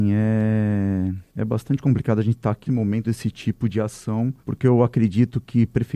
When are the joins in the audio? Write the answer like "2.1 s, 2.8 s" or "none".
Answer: 1.3 s, 2.7 s, 3.0 s, 4.4 s